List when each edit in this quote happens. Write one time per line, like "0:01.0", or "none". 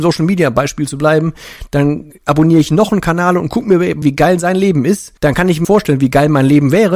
0:04.0
0:05.2
0:05.6

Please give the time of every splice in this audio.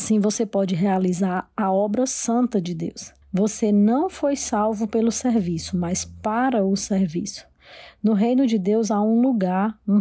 0:03.2

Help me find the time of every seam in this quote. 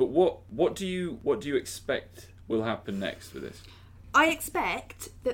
none

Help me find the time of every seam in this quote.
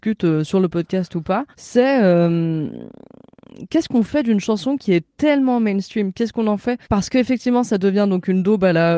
0:01.5
0:06.8

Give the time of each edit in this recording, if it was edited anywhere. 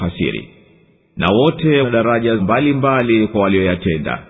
0:01.8
0:02.4

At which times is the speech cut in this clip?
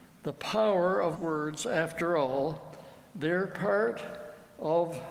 0:01.2

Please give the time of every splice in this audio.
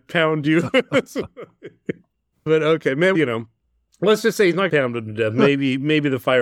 0:03.1
0:04.7

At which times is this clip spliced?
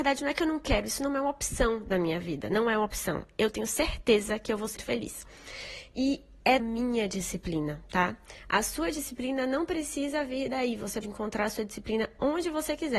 0:04.8
0:06.6
0:11.0

